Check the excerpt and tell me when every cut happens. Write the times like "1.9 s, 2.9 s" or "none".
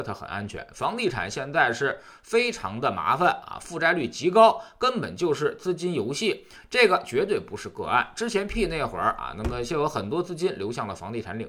8.5 s